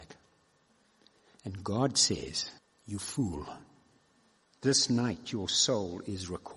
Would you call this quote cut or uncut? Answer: cut